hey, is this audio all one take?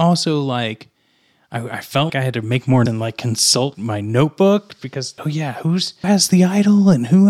no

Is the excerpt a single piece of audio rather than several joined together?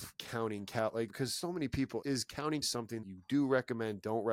no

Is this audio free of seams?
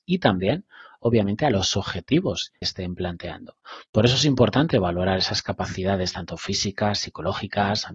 no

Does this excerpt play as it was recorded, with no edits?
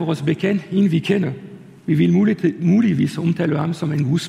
yes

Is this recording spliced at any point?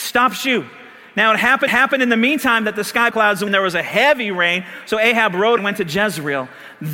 yes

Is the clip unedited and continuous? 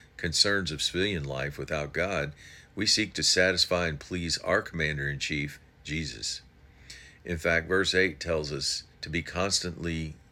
no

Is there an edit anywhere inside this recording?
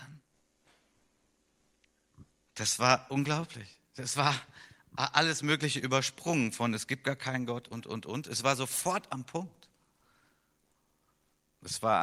no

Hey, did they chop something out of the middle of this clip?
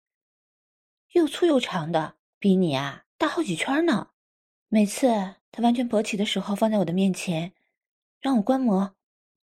yes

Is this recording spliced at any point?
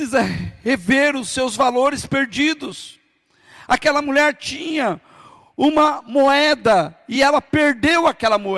no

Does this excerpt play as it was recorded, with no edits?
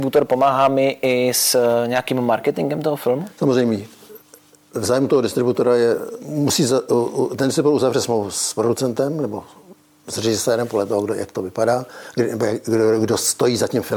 yes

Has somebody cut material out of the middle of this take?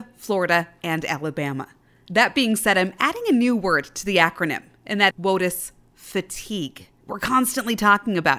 yes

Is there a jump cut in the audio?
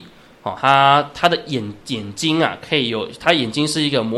no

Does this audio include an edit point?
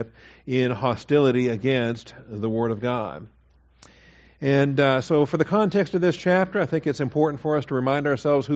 no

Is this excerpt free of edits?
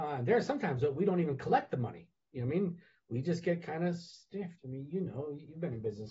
no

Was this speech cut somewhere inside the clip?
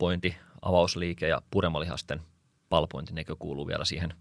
no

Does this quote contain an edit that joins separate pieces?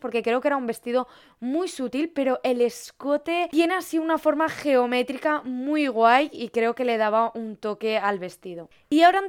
no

